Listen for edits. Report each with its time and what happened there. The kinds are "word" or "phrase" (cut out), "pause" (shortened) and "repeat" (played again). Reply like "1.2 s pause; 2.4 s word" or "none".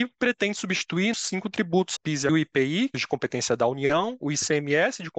1.1 s phrase; 2.0 s phrase; 2.3 s phrase; 2.9 s phrase